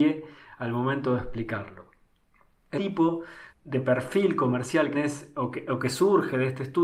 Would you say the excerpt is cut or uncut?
cut